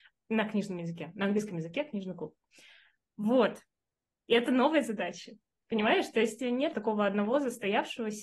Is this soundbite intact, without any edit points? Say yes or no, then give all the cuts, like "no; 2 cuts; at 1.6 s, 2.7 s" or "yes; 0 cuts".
no; 2 cuts; at 6.4 s, 6.7 s